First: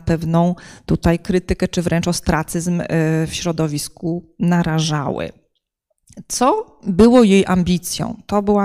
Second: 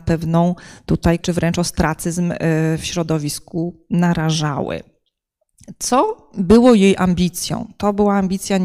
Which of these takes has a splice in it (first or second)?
second